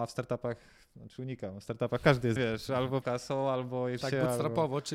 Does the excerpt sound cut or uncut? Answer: cut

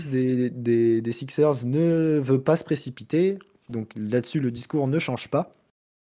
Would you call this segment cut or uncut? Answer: uncut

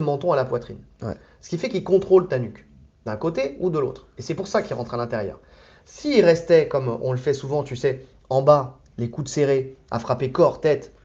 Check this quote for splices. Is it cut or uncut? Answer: uncut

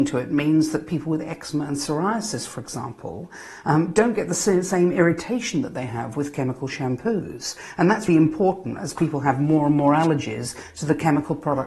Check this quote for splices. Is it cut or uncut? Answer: cut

